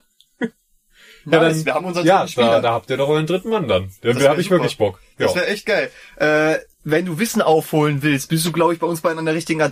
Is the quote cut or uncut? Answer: uncut